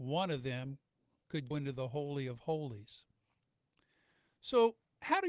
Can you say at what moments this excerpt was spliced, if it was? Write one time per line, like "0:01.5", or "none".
0:01.5